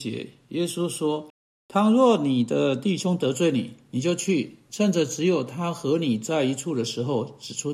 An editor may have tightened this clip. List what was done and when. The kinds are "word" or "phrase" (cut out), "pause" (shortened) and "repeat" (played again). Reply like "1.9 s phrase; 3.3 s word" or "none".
1.3 s pause